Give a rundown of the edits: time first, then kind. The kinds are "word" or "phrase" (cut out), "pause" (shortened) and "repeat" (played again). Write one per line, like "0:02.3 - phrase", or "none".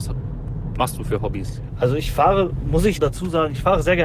0:02.9 - word

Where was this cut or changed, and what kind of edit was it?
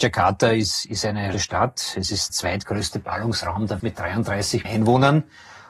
0:01.3 - word
0:02.3 - word
0:03.8 - word
0:04.6 - word

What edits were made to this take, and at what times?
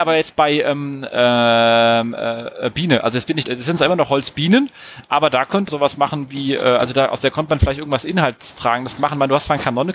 0:01.1 - word
0:03.4 - phrase
0:05.7 - phrase

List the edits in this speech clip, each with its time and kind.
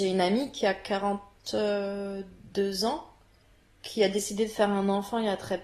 none

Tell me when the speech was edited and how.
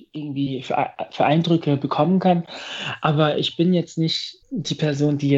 0:04.4 - pause

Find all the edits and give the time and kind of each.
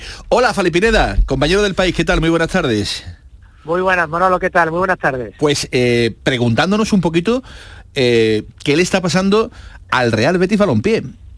none

